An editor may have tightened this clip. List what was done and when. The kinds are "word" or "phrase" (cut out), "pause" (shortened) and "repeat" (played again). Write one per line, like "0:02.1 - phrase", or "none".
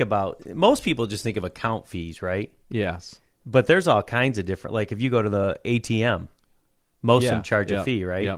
none